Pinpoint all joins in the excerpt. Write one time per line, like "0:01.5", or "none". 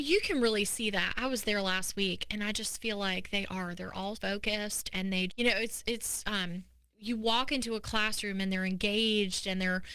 0:04.1
0:05.3